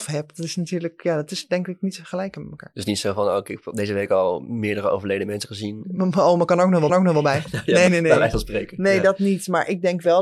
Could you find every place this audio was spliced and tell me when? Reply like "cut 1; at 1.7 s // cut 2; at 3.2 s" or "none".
cut 1; at 6.9 s // cut 2; at 7.9 s